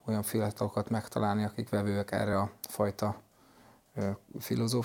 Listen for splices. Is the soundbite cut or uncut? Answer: uncut